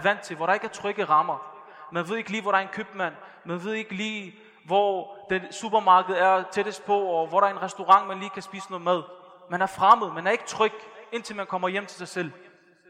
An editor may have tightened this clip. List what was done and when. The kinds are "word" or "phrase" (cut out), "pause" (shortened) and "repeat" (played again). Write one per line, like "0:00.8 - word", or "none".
none